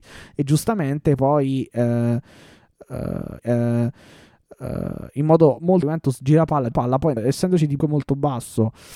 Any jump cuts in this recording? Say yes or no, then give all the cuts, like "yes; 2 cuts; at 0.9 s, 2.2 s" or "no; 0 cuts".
yes; 5 cuts; at 3.4 s, 5.8 s, 6.7 s, 7.2 s, 7.8 s